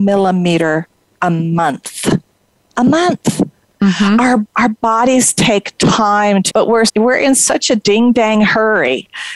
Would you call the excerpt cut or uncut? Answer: cut